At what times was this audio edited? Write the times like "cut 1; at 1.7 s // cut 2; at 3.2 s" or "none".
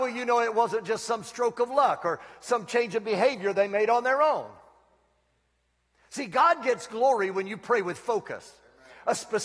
none